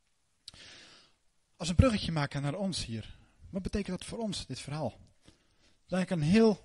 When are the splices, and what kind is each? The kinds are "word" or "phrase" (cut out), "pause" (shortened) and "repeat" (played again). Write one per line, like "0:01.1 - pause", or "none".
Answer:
none